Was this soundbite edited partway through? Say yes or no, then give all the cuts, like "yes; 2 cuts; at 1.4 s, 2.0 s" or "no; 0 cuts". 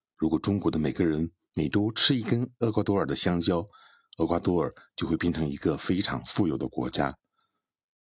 no; 0 cuts